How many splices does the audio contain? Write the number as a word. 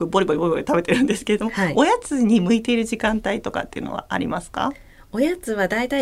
zero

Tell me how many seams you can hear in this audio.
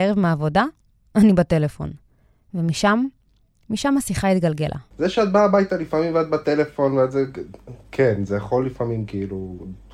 zero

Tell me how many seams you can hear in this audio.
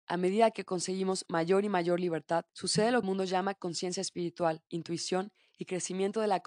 three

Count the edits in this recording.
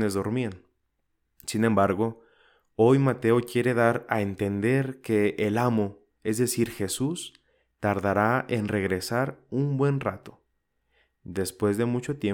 zero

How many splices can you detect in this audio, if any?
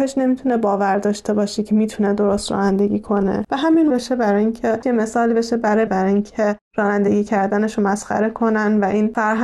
three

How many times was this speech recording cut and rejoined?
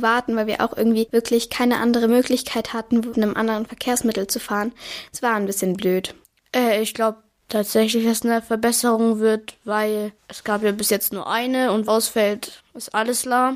one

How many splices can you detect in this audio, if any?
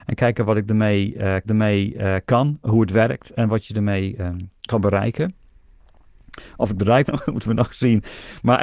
two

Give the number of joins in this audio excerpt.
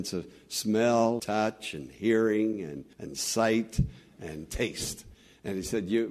two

